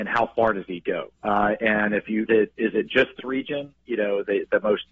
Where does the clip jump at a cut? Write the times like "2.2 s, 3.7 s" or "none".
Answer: 1.1 s, 2.3 s, 3.2 s